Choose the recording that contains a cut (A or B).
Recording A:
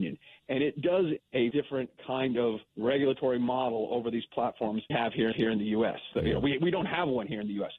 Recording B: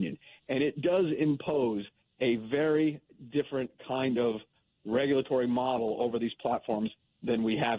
A